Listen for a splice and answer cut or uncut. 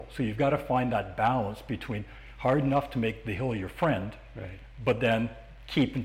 uncut